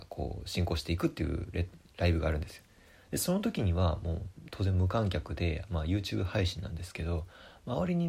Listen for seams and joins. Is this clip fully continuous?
yes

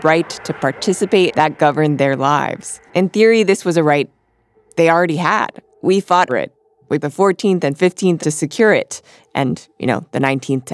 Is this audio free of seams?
no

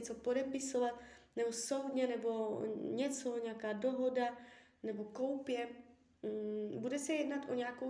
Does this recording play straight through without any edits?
yes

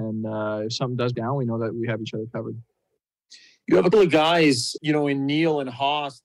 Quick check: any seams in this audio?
yes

